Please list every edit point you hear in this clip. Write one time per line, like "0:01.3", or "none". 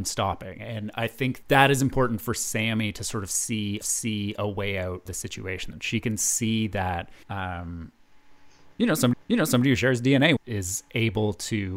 0:01.4
0:03.8
0:05.1
0:05.7
0:07.2
0:09.1
0:10.4